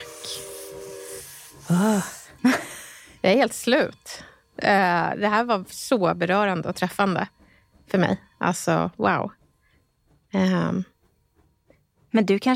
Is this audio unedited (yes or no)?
yes